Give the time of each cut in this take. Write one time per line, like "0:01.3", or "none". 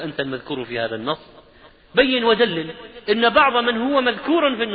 none